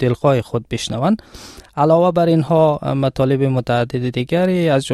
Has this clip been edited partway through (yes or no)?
no